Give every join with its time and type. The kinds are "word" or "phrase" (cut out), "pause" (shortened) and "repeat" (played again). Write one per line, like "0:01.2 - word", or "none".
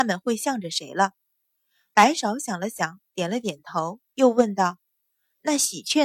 none